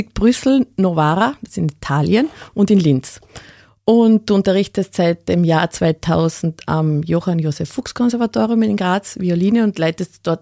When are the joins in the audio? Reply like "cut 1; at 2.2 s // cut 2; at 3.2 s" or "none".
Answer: none